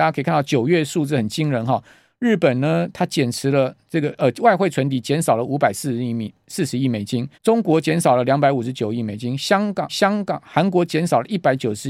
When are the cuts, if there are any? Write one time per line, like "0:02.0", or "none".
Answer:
0:07.3
0:09.9